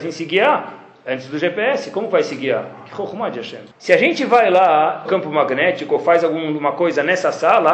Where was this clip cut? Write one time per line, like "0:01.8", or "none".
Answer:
0:03.7
0:05.1